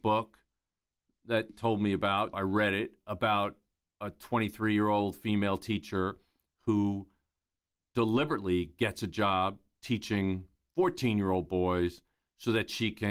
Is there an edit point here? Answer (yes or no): yes